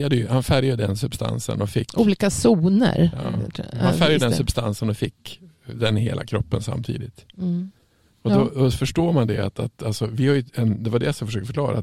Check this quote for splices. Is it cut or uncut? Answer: uncut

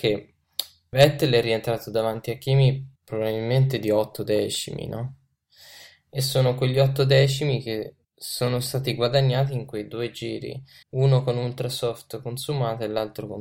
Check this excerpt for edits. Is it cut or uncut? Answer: cut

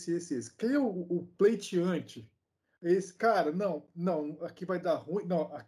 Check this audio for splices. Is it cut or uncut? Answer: uncut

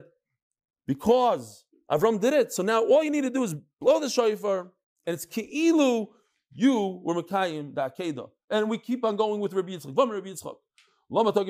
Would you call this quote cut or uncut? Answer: uncut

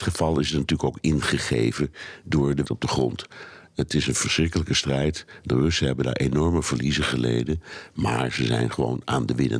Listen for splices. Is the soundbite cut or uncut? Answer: cut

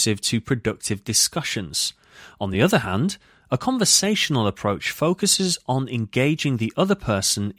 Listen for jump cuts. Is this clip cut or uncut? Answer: uncut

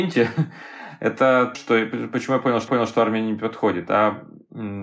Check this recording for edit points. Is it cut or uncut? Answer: cut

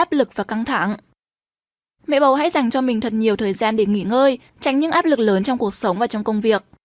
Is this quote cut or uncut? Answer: uncut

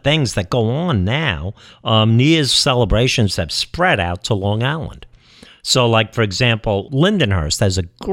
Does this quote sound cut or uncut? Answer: cut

